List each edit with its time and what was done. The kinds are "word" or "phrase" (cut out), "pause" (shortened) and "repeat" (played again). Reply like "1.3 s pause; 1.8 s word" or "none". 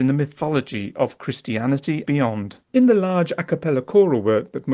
2.1 s word; 2.6 s pause